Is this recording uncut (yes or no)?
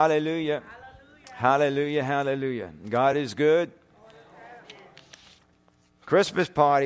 yes